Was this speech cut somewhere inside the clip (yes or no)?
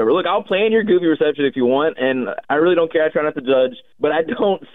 yes